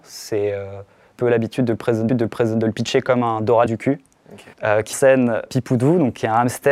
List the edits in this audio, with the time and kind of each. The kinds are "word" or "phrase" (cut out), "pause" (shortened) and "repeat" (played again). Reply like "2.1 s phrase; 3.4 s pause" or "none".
1.1 s phrase; 2.1 s repeat; 3.7 s word; 4.5 s pause; 4.9 s phrase; 5.5 s word